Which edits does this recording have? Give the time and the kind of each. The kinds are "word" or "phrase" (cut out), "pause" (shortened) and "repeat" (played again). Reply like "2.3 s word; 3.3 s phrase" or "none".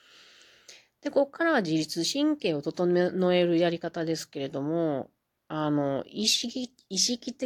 none